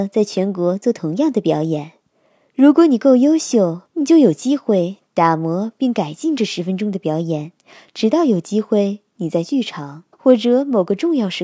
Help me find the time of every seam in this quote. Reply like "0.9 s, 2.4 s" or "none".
3.9 s, 10.1 s